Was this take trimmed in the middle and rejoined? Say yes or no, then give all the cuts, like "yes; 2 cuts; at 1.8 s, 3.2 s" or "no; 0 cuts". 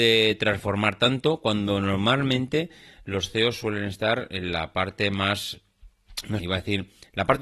yes; 1 cut; at 6.4 s